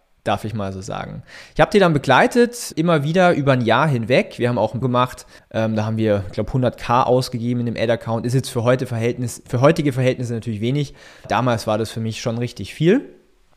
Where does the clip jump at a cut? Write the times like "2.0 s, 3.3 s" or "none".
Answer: 2.7 s, 4.8 s, 5.4 s, 11.2 s